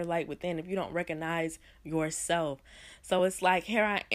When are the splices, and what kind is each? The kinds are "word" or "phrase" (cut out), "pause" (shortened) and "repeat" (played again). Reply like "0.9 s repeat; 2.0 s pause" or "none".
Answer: none